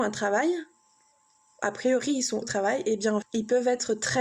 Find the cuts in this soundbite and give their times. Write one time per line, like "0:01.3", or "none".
0:02.4
0:03.2